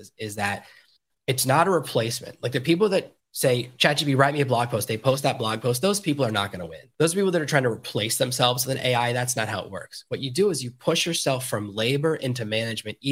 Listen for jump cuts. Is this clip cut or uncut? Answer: cut